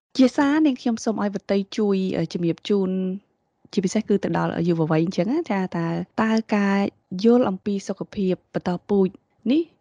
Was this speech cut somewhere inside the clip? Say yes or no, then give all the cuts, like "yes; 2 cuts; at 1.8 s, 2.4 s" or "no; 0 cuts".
yes; 1 cut; at 6.1 s